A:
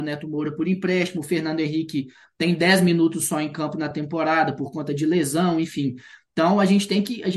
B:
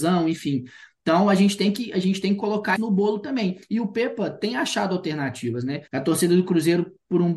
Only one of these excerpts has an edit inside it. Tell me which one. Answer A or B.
B